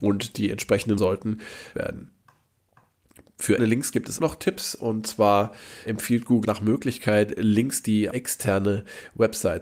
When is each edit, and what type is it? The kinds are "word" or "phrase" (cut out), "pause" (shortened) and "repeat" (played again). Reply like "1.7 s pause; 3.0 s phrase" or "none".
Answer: 1.0 s word; 1.7 s word; 3.6 s word; 4.2 s word; 5.9 s word; 6.4 s word; 8.1 s word